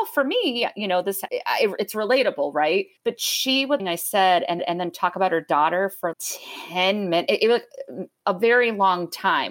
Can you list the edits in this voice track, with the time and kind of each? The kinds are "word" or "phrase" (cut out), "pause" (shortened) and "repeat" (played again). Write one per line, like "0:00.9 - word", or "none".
0:01.3 - word
0:03.0 - pause
0:03.8 - phrase
0:04.6 - repeat
0:06.1 - word